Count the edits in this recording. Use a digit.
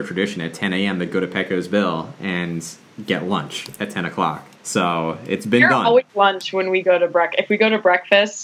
2